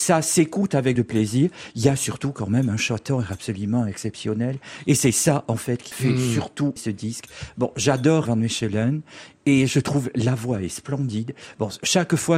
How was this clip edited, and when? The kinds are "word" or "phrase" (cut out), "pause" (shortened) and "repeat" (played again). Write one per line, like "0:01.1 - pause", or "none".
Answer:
0:01.0 - word
0:05.9 - word
0:06.8 - word
0:08.3 - word